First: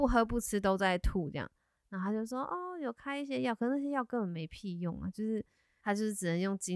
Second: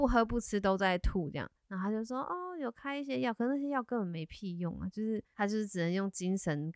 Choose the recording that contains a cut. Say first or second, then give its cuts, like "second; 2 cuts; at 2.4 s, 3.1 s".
second; 2 cuts; at 1.6 s, 5.3 s